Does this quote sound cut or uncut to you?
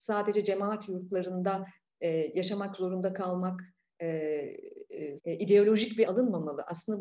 cut